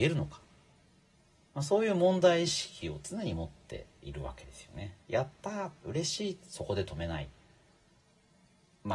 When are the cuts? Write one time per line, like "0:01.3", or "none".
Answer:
0:05.0